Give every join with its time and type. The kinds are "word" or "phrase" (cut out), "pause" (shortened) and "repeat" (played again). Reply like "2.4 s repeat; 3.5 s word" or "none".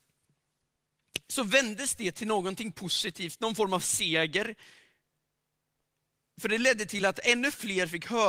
none